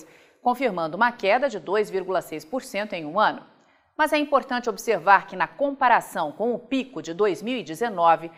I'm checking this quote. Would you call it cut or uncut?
uncut